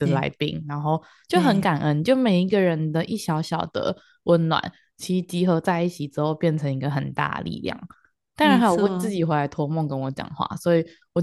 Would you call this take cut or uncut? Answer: uncut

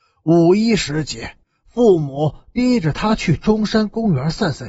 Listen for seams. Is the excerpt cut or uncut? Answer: cut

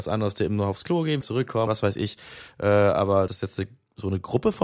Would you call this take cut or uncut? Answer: cut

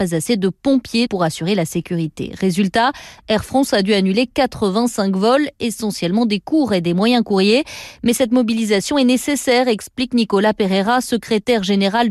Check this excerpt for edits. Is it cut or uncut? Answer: cut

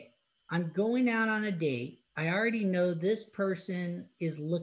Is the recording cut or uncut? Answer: cut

